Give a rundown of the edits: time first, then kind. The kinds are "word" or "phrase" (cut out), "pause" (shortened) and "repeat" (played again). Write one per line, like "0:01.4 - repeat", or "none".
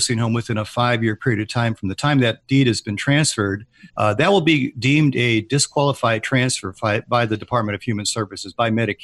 0:03.9 - pause